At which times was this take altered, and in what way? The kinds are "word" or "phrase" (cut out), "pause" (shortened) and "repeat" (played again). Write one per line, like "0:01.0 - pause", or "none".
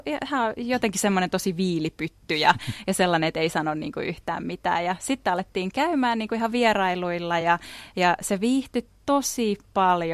none